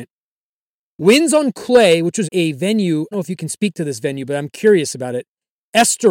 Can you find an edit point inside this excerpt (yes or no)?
yes